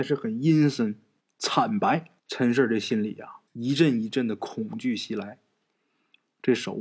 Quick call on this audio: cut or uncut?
cut